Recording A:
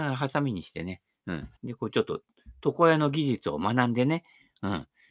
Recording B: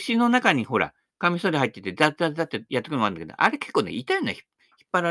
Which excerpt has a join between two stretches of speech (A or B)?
A